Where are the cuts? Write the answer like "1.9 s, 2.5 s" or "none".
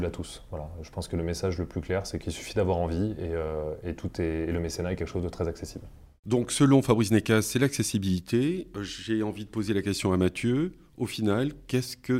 none